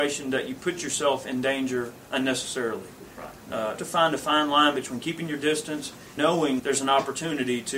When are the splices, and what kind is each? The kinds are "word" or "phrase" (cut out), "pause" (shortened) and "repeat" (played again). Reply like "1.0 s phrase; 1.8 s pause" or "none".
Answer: 3.8 s phrase; 6.2 s word; 6.6 s word